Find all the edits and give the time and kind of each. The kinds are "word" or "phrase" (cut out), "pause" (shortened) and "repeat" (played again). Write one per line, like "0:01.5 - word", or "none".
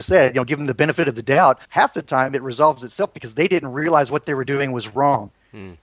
0:01.6 - pause